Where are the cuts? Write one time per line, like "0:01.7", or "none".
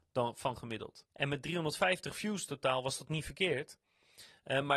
0:01.1